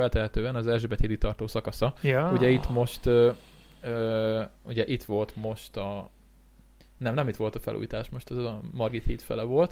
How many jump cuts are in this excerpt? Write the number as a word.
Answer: zero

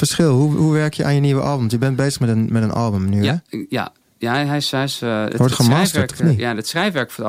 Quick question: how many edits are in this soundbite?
zero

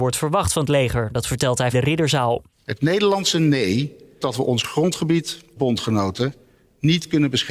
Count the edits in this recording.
three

